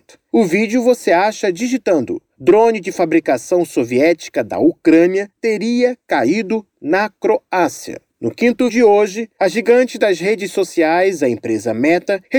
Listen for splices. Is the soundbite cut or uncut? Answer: cut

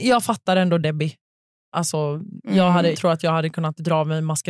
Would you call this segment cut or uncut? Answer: cut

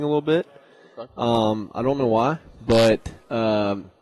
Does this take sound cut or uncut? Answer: uncut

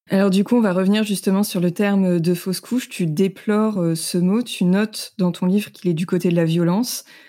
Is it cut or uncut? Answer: uncut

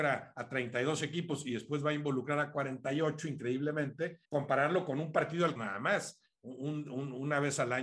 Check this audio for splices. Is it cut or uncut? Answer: cut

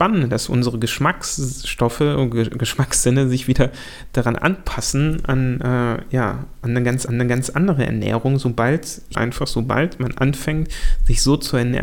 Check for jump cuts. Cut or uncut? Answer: cut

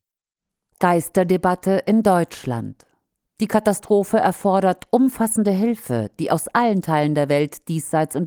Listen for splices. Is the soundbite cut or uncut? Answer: uncut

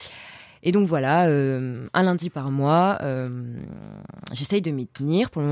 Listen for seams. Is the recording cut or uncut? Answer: uncut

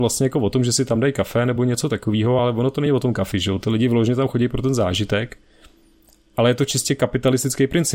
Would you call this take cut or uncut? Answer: uncut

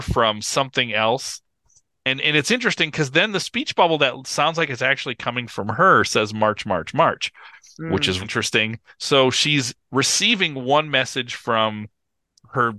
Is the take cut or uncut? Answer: cut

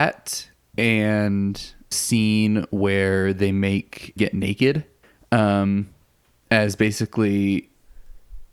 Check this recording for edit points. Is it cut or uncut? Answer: cut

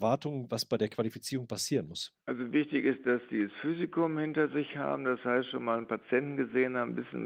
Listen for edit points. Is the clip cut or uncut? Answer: cut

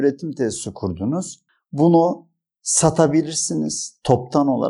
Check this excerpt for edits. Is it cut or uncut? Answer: uncut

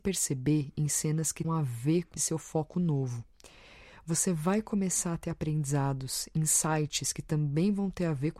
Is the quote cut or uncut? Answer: cut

